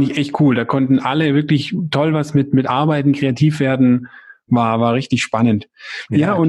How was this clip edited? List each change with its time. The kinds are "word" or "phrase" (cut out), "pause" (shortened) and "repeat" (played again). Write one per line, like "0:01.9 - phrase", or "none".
none